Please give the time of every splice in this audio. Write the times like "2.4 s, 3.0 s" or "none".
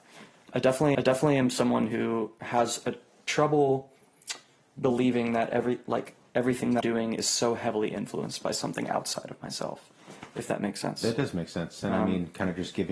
0.9 s, 6.8 s